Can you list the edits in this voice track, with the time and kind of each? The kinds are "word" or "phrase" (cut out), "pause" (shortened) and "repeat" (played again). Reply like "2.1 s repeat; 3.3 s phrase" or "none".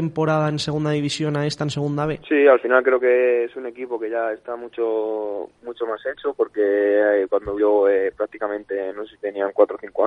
2.2 s pause; 5.5 s pause; 7.6 s word